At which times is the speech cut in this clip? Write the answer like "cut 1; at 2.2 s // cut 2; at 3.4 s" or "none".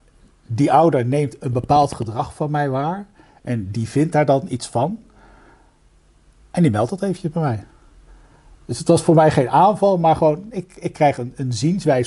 none

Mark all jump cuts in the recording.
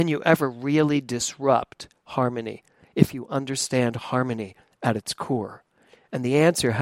none

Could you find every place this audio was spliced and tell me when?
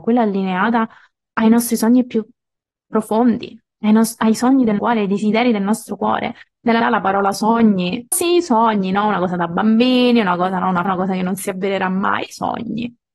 cut 1; at 4.8 s // cut 2; at 6.8 s // cut 3; at 8.1 s // cut 4; at 10.8 s

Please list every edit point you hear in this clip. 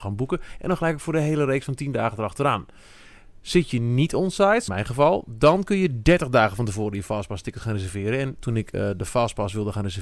cut 1; at 4.7 s // cut 2; at 8.4 s

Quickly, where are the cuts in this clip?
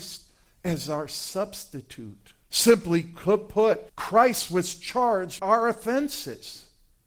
cut 1; at 2.4 s // cut 2; at 3.9 s // cut 3; at 5.4 s

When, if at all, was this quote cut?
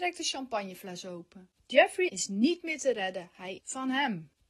cut 1; at 2.1 s // cut 2; at 3.6 s

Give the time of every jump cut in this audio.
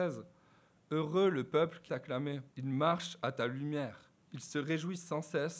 cut 1; at 1.9 s // cut 2; at 2.5 s // cut 3; at 4.2 s

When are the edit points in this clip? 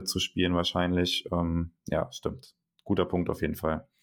cut 1; at 1.8 s

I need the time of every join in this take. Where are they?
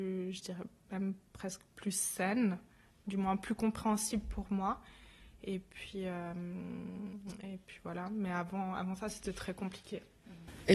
none

